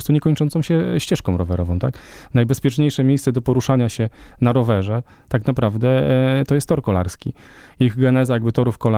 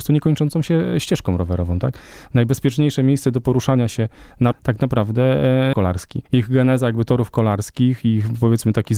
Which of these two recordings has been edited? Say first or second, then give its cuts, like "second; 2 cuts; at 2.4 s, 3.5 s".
second; 3 cuts; at 4.5 s, 5.7 s, 6.3 s